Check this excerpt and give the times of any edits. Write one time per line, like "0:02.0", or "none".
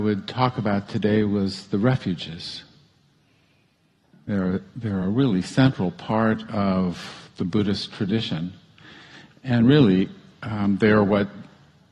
none